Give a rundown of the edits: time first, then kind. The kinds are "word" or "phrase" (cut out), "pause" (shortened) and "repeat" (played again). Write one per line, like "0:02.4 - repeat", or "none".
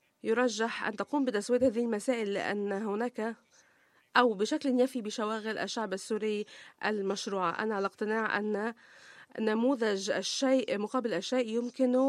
none

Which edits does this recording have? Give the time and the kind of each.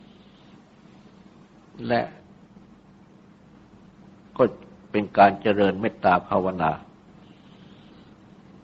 0:04.3 - pause

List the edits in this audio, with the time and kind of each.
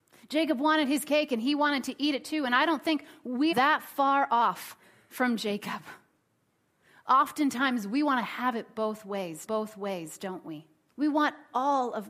0:03.5 - word
0:09.5 - repeat
0:10.9 - pause

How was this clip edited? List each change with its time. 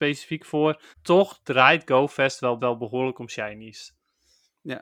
0:00.9 - pause
0:02.6 - repeat

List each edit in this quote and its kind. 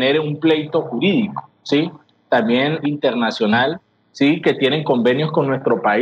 0:02.8 - phrase

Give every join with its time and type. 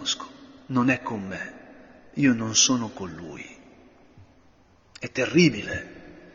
none

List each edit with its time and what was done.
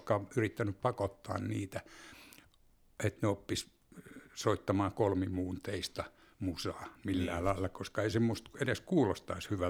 none

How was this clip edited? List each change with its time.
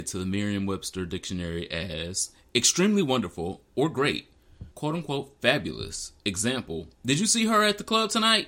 0:04.7 - pause

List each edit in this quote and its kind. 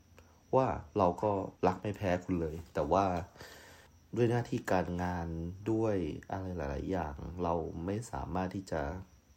0:01.6 - pause
0:03.9 - pause

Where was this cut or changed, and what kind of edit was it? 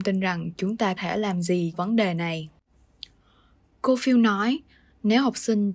0:01.0 - word
0:01.7 - word

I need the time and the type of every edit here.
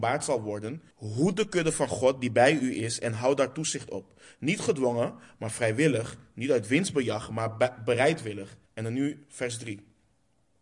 0:00.9 - pause
0:08.7 - pause

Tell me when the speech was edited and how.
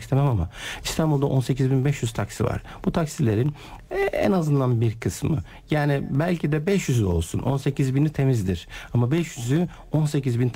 none

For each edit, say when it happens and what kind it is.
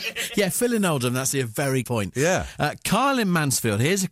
0:01.3 - word
0:01.8 - word

